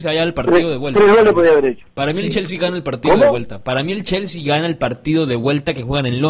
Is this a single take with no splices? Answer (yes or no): yes